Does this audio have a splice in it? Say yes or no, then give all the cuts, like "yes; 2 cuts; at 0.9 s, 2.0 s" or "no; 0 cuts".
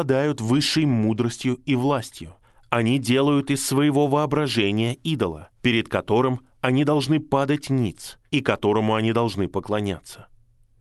yes; 3 cuts; at 2.4 s, 5.6 s, 8.3 s